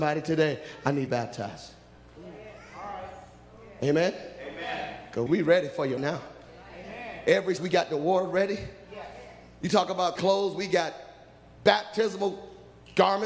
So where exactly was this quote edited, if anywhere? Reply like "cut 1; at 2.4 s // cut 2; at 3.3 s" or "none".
cut 1; at 1.1 s // cut 2; at 5.3 s // cut 3; at 6.0 s // cut 4; at 7.6 s // cut 5; at 10.2 s